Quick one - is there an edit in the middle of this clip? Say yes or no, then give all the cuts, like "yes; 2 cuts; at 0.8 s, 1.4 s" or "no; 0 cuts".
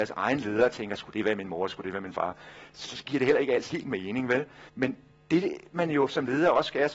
yes; 3 cuts; at 2.8 s, 3.7 s, 4.7 s